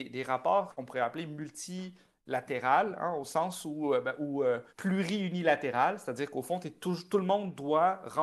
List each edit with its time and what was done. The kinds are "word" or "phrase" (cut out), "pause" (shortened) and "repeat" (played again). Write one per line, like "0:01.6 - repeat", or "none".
0:04.7 - pause